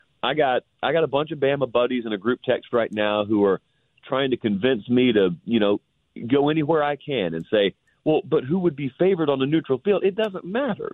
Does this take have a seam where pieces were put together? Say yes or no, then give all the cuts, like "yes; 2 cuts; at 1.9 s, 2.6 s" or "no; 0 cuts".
no; 0 cuts